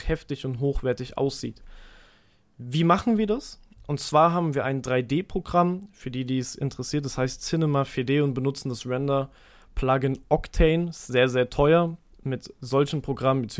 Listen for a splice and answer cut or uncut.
uncut